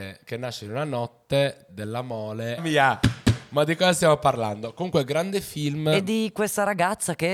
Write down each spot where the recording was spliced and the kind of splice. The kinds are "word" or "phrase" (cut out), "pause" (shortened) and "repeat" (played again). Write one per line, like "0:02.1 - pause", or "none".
0:01.7 - phrase
0:02.6 - phrase